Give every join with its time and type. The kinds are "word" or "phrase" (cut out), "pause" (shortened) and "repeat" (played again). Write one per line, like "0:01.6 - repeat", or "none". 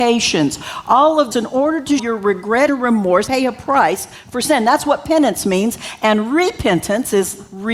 0:01.3 - word
0:02.0 - word
0:02.7 - word
0:03.3 - word

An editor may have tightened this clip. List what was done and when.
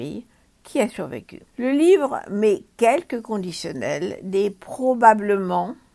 0:01.5 - pause

